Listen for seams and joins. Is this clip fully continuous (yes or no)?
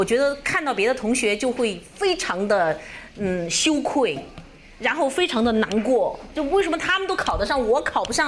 yes